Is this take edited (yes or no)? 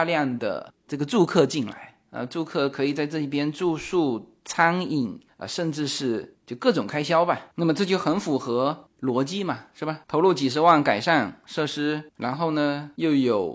yes